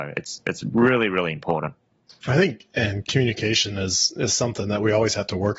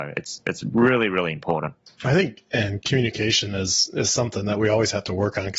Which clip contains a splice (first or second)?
second